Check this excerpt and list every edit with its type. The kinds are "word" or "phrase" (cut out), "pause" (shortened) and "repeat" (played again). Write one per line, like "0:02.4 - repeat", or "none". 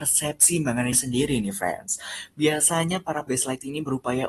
0:00.9 - word
0:03.3 - word